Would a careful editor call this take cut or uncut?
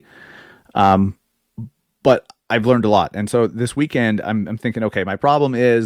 uncut